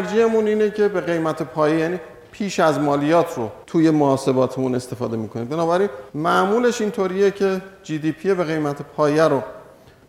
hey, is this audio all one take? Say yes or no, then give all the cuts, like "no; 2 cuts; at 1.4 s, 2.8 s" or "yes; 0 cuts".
no; 2 cuts; at 3.6 s, 6.1 s